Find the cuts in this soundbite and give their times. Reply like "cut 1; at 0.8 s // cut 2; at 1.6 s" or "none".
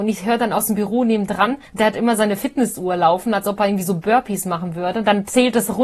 cut 1; at 1.7 s

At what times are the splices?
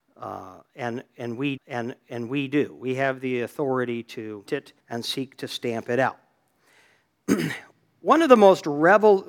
cut 1; at 1.6 s // cut 2; at 4.5 s // cut 3; at 4.8 s

